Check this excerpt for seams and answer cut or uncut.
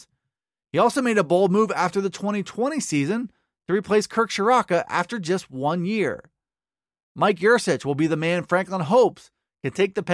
uncut